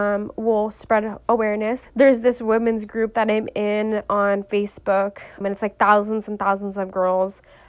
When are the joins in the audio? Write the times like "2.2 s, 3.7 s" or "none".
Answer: 1.8 s, 5.4 s